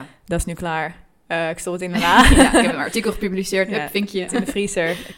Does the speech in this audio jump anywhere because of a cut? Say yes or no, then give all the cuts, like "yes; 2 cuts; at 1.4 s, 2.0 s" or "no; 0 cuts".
yes; 1 cut; at 4.3 s